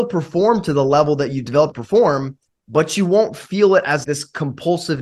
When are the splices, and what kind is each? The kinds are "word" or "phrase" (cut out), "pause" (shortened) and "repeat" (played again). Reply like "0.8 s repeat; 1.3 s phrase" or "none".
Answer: 1.7 s phrase; 2.5 s pause; 4.0 s word